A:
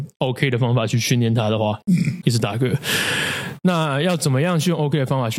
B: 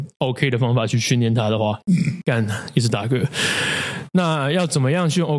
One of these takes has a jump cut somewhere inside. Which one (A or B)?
A